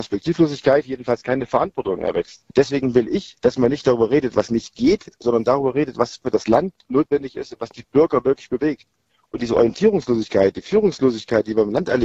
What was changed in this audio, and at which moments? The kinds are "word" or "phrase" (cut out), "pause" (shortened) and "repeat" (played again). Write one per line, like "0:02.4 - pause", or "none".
0:02.5 - pause
0:03.4 - pause